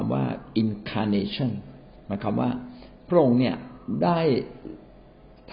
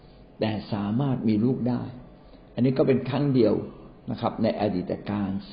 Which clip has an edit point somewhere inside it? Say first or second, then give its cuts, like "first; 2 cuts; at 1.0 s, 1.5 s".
first; 1 cut; at 2.0 s